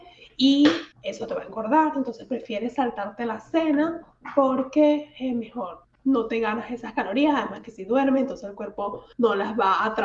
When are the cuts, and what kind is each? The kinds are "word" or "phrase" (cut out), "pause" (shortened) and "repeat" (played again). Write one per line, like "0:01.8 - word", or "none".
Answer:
0:00.9 - pause
0:05.8 - word
0:09.1 - pause